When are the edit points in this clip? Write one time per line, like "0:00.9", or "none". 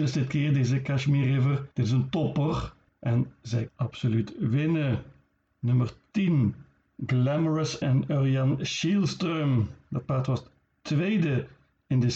0:01.7
0:03.7
0:07.8